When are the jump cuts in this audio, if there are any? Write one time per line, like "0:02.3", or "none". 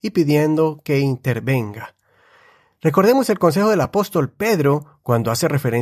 none